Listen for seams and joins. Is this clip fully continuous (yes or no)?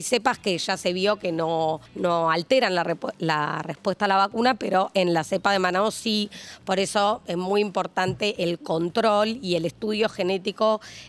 no